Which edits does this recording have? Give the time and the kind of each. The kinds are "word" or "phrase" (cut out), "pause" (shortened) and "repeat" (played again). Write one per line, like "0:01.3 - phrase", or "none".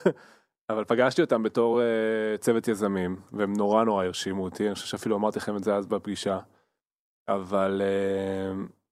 none